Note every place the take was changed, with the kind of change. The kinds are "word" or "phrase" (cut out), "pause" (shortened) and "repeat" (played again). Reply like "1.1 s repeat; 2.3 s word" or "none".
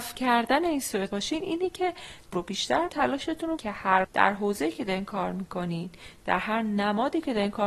1.1 s phrase; 2.3 s word; 2.9 s phrase; 3.6 s word; 4.0 s word